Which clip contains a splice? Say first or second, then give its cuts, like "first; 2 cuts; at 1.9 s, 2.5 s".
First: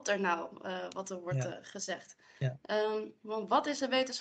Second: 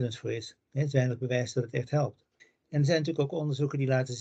second; 1 cut; at 2.4 s